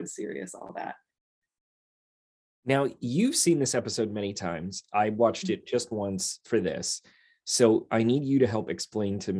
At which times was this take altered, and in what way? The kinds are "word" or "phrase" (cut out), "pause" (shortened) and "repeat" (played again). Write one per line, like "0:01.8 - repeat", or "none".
none